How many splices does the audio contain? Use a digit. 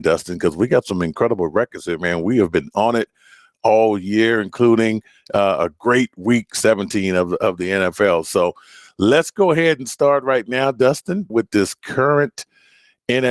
1